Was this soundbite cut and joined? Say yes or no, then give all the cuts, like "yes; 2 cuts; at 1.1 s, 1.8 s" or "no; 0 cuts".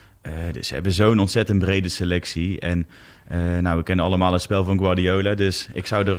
no; 0 cuts